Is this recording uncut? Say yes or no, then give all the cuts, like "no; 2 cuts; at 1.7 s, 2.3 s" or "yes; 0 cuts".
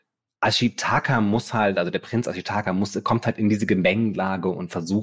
yes; 0 cuts